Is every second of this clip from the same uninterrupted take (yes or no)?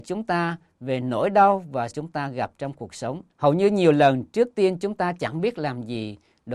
no